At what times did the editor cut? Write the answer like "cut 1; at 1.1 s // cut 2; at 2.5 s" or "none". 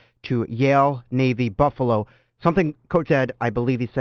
cut 1; at 3.1 s